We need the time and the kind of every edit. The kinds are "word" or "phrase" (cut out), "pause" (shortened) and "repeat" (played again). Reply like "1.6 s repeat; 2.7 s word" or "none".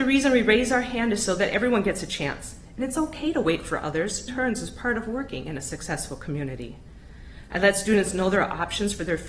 4.3 s phrase